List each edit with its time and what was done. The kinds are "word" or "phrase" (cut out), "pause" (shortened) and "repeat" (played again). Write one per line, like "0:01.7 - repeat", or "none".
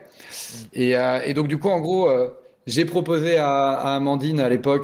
none